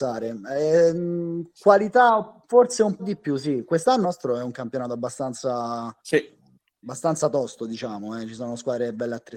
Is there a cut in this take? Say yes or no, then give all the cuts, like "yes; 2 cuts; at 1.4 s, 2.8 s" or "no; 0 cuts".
yes; 4 cuts; at 2.4 s, 3.0 s, 4.0 s, 6.0 s